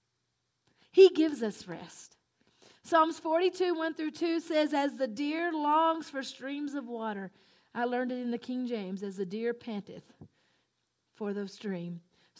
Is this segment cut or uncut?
uncut